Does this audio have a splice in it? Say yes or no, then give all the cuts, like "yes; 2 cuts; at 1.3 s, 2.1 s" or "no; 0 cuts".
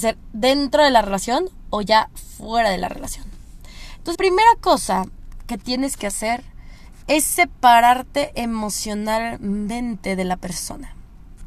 yes; 1 cut; at 4.1 s